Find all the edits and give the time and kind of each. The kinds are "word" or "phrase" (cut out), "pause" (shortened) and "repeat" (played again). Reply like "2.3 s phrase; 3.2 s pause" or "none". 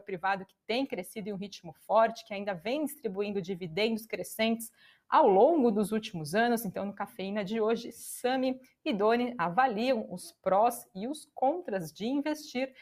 none